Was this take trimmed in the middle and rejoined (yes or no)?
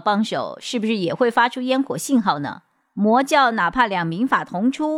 no